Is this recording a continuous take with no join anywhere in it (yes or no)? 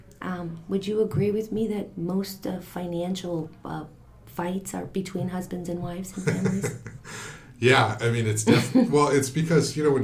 yes